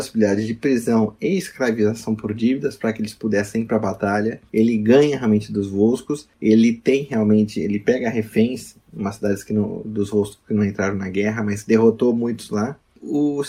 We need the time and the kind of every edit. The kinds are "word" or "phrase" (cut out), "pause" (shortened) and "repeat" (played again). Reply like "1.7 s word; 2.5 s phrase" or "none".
none